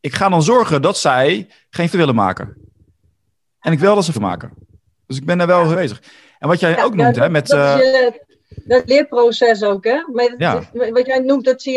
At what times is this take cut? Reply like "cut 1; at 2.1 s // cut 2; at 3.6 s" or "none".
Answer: cut 1; at 1.9 s // cut 2; at 3.8 s // cut 3; at 4.1 s // cut 4; at 5.7 s // cut 5; at 8.9 s